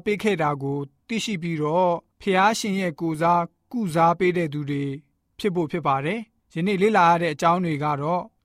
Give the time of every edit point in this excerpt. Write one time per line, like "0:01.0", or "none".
none